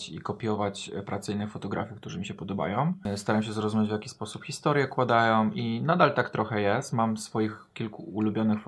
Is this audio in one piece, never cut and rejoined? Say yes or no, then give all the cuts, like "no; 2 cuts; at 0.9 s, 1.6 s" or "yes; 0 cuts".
yes; 0 cuts